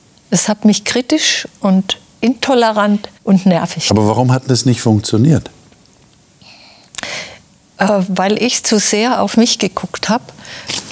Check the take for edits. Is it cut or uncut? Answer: cut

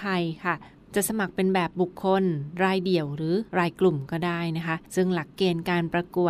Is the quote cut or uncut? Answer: cut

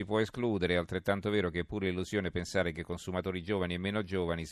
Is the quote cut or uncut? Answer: uncut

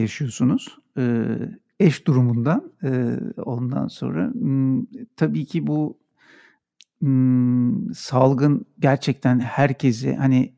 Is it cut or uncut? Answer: uncut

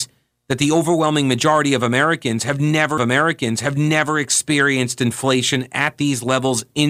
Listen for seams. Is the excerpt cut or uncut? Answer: cut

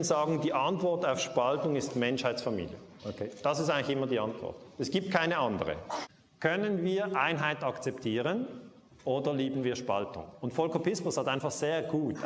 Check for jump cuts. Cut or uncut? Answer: uncut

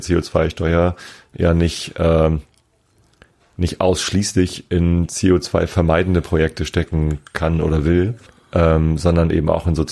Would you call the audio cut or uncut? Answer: cut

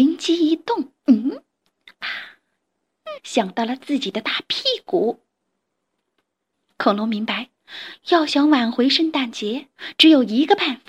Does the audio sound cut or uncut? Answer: cut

